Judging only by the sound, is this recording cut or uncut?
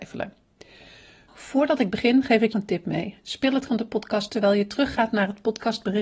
cut